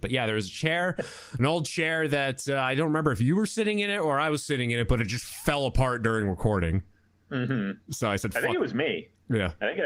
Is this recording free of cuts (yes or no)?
yes